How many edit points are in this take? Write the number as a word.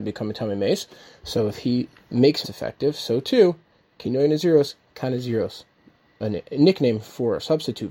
one